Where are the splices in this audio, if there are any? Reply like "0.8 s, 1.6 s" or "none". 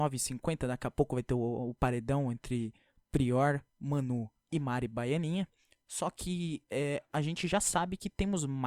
none